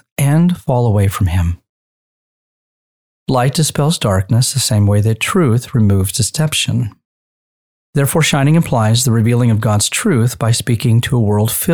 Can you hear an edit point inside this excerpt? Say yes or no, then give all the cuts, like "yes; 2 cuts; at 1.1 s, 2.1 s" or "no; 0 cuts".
no; 0 cuts